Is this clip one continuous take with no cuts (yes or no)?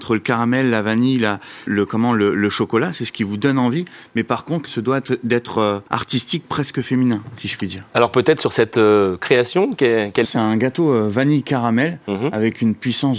no